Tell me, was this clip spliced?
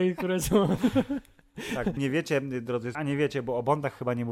yes; 2 cuts; at 2.0 s, 2.9 s

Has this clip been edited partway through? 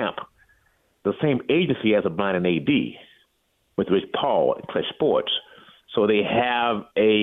no; 0 cuts

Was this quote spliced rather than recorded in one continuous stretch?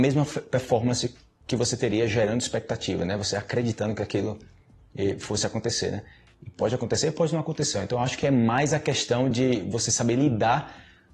no; 0 cuts

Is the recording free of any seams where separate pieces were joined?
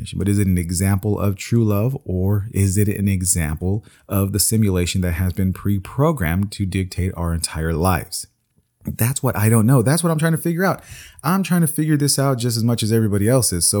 yes; 0 cuts

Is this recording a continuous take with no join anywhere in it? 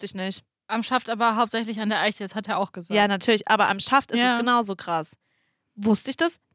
yes; 0 cuts

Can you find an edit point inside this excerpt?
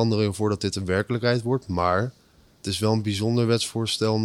no; 0 cuts

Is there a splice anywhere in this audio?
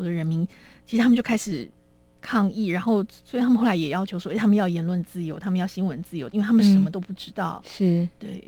no; 0 cuts

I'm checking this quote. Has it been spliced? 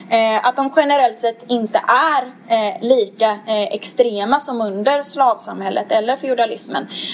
no; 0 cuts

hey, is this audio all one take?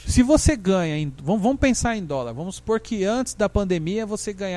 yes; 0 cuts

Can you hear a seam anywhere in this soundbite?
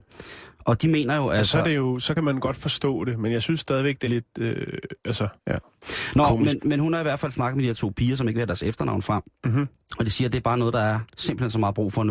yes; 3 cuts; at 2.2 s, 4.1 s, 5.4 s

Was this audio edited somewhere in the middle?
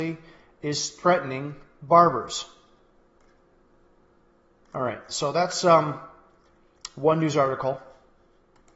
no; 0 cuts

